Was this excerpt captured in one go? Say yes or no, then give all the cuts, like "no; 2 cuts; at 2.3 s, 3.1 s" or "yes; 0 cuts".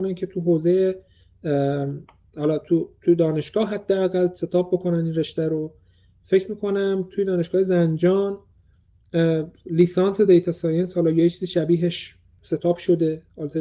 yes; 0 cuts